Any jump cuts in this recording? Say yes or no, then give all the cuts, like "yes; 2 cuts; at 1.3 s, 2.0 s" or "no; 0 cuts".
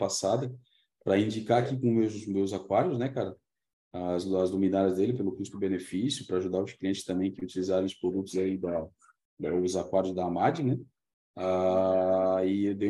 no; 0 cuts